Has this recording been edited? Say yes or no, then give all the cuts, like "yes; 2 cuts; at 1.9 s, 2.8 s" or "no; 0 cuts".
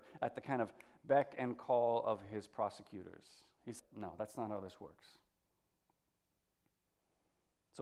yes; 1 cut; at 3.8 s